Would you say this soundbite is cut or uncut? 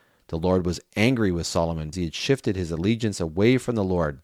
cut